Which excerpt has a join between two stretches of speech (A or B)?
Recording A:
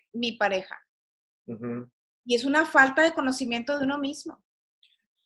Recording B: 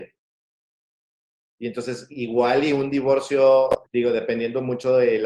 B